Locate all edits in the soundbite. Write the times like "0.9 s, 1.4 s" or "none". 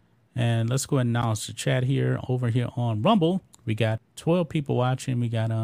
3.5 s, 4.0 s